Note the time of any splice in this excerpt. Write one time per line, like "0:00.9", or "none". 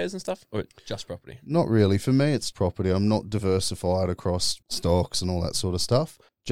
0:02.5
0:04.6